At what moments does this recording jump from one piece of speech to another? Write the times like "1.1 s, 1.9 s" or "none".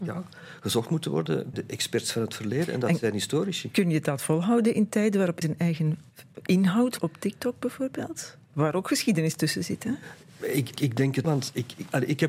1.5 s, 5.4 s, 7.0 s, 10.8 s, 11.2 s